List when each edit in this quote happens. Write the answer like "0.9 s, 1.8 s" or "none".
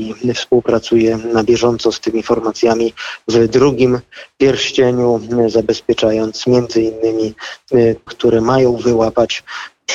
8.1 s